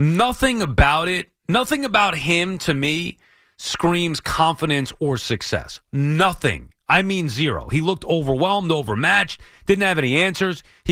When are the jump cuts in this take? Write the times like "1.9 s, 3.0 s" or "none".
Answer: none